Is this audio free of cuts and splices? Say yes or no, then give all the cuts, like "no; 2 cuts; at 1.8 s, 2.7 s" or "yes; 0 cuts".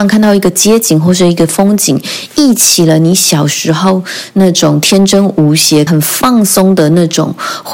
no; 2 cuts; at 2.3 s, 5.9 s